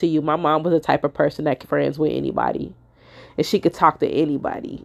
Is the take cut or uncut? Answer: cut